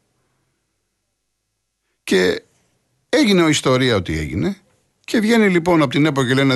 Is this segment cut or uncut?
uncut